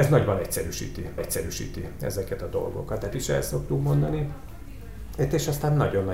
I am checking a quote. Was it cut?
yes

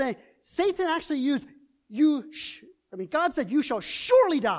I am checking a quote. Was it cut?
no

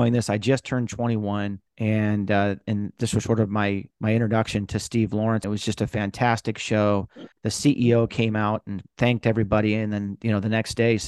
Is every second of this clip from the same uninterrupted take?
no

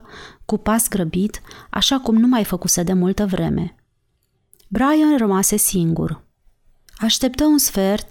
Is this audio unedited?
yes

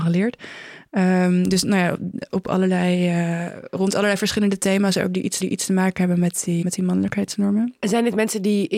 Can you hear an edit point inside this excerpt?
yes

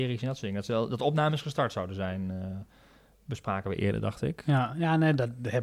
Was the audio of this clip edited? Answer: no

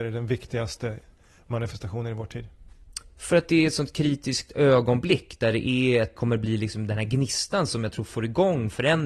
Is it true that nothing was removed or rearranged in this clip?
no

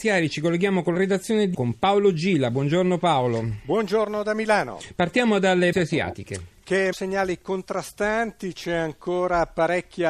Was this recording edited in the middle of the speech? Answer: yes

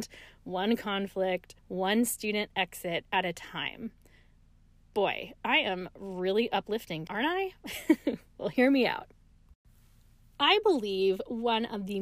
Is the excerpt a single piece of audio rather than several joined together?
no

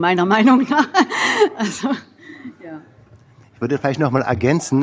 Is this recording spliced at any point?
no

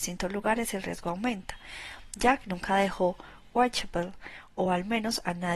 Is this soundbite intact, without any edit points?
yes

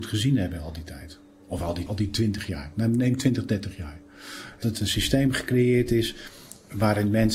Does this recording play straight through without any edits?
no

